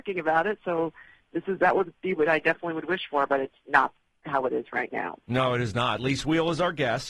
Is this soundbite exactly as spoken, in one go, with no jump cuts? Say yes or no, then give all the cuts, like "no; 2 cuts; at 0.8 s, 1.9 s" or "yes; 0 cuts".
yes; 0 cuts